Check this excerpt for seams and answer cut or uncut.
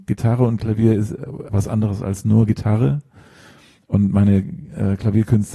cut